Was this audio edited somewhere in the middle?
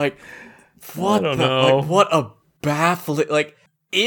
no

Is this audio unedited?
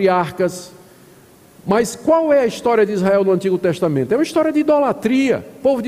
yes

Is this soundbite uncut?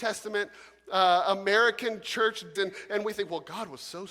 no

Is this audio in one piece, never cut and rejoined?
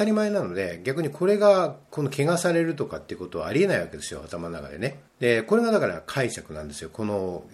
no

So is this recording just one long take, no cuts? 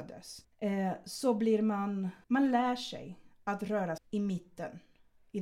no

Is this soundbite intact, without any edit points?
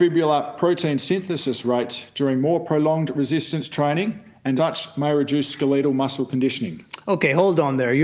no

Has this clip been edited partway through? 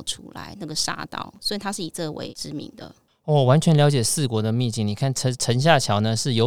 no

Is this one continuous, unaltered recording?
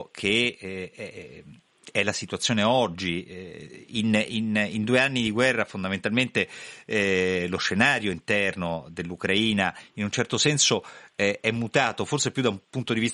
yes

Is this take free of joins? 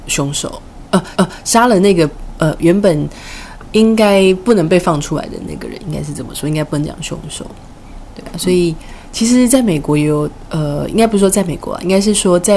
no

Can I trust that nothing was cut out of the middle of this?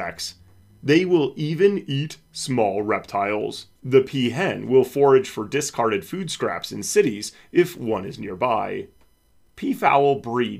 no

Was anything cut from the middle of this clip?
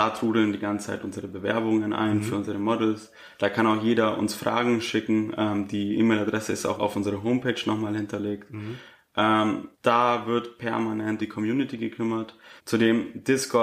yes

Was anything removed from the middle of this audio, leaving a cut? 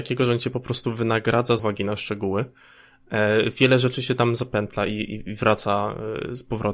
yes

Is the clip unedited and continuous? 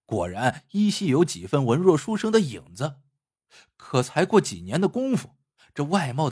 yes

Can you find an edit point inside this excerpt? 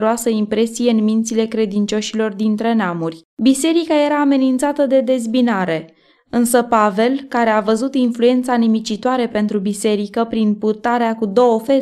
yes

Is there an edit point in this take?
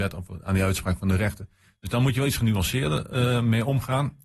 no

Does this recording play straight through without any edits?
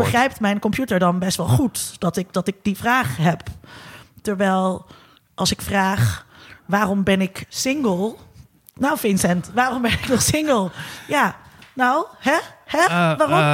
yes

